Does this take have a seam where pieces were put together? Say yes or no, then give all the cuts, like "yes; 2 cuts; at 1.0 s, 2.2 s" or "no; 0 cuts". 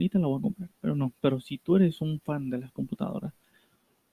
no; 0 cuts